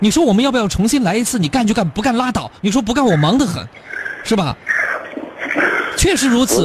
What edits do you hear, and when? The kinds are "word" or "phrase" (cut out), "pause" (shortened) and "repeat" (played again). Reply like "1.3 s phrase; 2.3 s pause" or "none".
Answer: 2.6 s pause